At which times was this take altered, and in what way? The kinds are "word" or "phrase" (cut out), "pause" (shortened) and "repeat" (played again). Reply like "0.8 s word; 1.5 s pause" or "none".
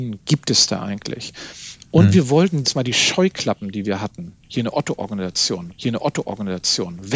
2.6 s phrase; 5.7 s repeat